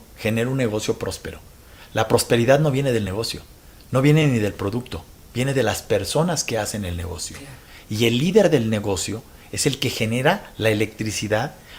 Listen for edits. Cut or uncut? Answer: uncut